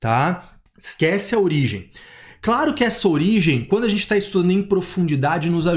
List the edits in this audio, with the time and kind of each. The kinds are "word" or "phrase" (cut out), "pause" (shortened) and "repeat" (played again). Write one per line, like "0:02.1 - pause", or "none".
none